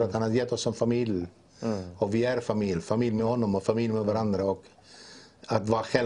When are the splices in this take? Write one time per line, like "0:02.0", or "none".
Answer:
none

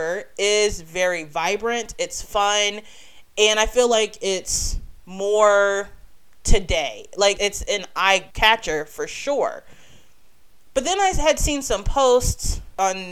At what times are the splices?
0:07.4

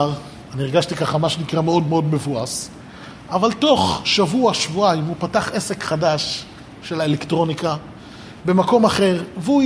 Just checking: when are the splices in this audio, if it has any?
none

